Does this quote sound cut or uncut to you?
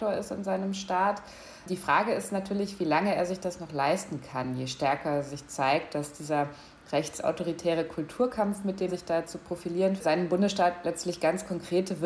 cut